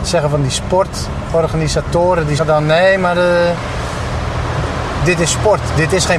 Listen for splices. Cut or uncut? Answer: cut